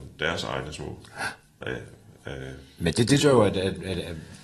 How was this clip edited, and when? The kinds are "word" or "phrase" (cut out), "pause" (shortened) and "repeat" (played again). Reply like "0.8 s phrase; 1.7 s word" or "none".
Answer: 1.6 s word; 3.2 s word